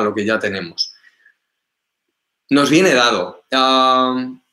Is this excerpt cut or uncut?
uncut